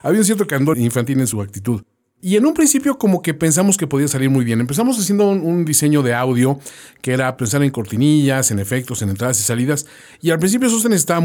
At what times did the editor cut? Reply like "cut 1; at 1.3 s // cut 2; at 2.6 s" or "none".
cut 1; at 7.4 s